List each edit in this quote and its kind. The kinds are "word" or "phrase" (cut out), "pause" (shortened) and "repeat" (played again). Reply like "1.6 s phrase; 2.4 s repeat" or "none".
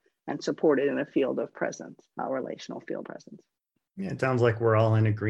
2.1 s pause; 3.0 s word; 3.6 s pause; 4.2 s word